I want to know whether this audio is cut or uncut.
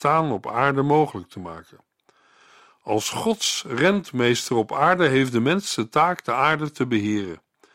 uncut